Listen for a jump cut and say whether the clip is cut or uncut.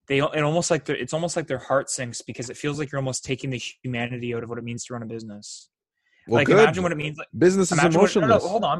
uncut